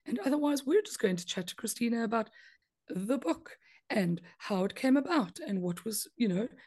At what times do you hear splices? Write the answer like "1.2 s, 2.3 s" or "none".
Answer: none